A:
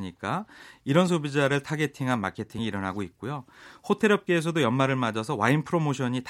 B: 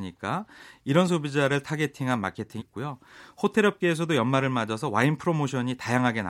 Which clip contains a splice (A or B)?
B